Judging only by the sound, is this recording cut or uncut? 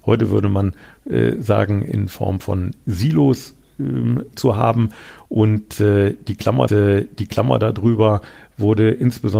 cut